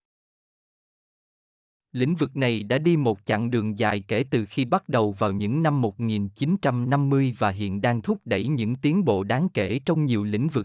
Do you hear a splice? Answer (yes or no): no